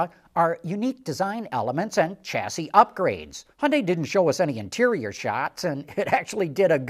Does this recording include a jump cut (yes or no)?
yes